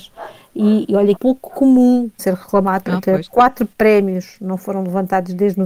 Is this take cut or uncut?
cut